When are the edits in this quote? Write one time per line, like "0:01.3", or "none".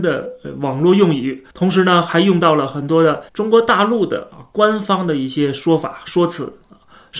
0:01.5
0:03.3